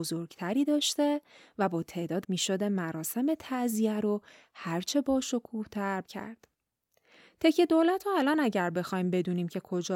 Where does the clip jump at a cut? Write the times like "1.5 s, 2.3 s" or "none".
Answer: 2.2 s, 6.0 s